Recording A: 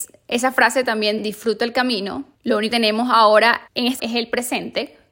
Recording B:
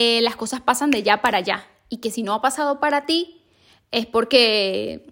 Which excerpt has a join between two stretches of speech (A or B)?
A